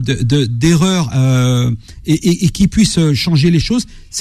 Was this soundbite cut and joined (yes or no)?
no